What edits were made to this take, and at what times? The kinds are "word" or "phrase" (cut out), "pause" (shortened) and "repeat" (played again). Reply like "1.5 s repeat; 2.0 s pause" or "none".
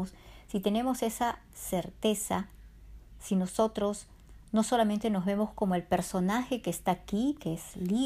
none